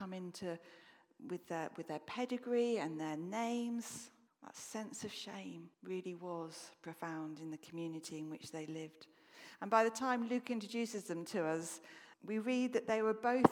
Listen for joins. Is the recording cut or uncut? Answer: cut